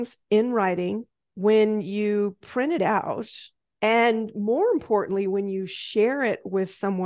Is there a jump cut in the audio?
no; 0 cuts

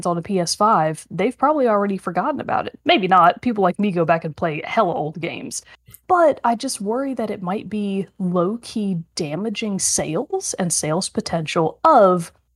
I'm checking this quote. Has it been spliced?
no; 0 cuts

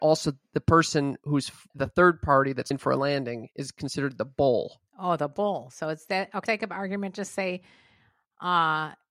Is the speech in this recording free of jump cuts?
no; 4 cuts; at 1.7 s, 2.7 s, 4.9 s, 6.5 s

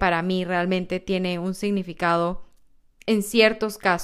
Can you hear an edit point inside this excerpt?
no; 0 cuts

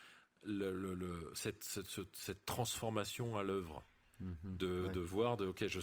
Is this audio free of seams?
yes; 0 cuts

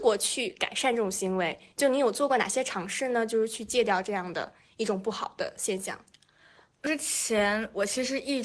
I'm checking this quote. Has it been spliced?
no; 0 cuts

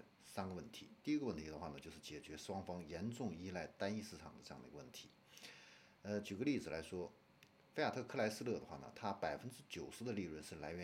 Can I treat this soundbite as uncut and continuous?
yes; 0 cuts

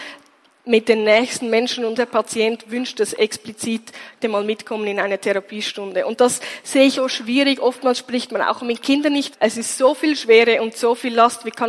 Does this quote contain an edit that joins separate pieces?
yes; 4 cuts; at 2.0 s, 4.2 s, 6.9 s, 9.3 s

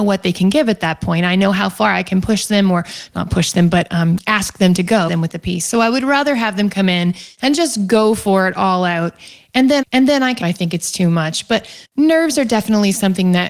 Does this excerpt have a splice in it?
yes; 4 cuts; at 5.1 s, 9.8 s, 10.4 s, 11.8 s

